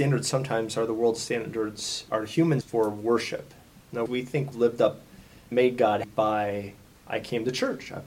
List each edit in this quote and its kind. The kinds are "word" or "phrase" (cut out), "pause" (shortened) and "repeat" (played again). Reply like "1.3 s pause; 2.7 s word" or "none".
2.1 s word; 2.6 s word; 4.1 s word; 4.5 s word; 5.5 s word; 6.0 s word

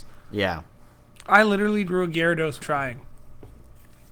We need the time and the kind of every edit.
1.9 s word; 2.6 s word

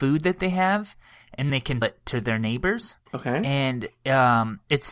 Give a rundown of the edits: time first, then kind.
1.5 s word; 1.8 s word; 3.1 s pause

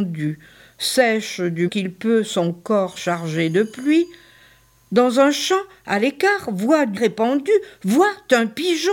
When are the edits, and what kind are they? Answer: 1.7 s word; 7.0 s word

